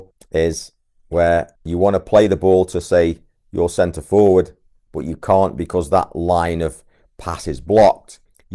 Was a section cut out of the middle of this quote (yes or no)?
no